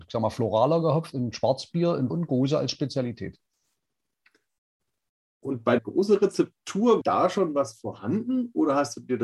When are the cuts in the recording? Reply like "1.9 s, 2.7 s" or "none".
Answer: 1.1 s, 2.1 s, 5.8 s, 7.0 s